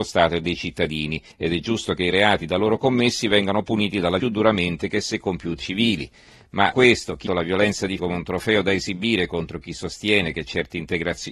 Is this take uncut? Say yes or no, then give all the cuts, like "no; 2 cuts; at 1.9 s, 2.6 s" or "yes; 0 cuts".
no; 6 cuts; at 1.3 s, 4.2 s, 5.6 s, 6.7 s, 7.3 s, 8.0 s